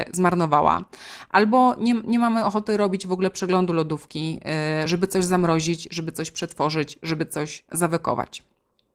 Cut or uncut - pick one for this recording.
uncut